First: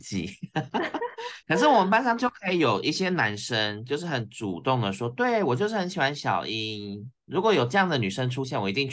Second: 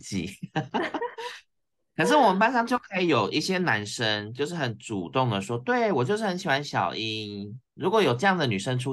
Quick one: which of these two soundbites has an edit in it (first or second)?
first